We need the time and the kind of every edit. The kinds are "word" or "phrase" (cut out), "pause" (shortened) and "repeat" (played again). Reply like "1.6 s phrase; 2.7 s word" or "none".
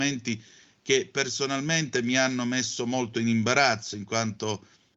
none

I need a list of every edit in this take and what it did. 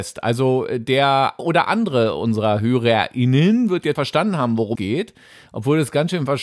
1.4 s word; 4.0 s word; 4.8 s word

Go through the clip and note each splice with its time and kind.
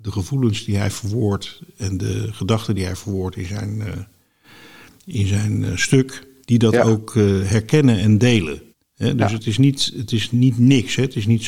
6.4 s pause; 8.7 s pause

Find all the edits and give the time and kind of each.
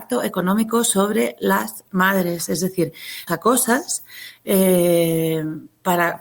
3.3 s word

